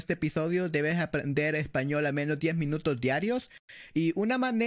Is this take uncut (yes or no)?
yes